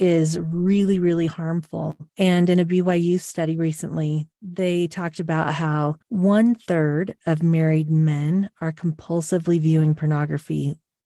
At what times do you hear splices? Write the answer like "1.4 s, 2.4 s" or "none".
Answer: 2.1 s, 4.3 s, 6.0 s